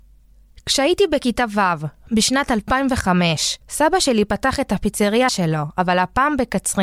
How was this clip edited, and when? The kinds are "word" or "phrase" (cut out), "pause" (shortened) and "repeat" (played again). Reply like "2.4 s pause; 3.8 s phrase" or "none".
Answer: 3.6 s pause; 5.3 s word